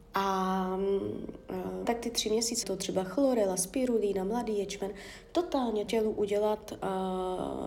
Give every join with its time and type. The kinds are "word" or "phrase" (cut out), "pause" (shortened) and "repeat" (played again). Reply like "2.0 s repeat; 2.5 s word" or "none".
1.8 s word; 2.6 s word; 5.9 s word